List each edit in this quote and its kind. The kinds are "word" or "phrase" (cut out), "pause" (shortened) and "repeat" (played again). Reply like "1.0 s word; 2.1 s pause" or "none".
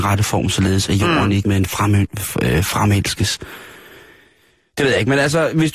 1.4 s word